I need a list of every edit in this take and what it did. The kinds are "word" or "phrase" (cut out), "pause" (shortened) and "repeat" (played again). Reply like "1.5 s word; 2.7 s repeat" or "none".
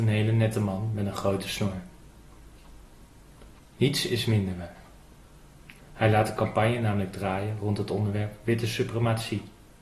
none